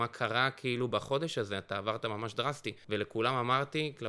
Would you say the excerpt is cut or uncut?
uncut